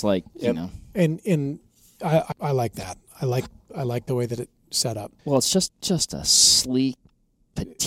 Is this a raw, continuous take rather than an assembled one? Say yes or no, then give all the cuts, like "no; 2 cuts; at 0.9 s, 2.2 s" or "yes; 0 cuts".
no; 3 cuts; at 2.3 s, 5.2 s, 5.7 s